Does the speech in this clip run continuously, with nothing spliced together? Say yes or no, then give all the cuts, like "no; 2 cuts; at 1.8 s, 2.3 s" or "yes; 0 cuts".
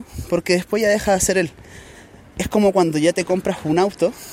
yes; 0 cuts